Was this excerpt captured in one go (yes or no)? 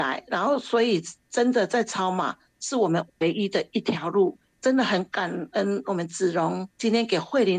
no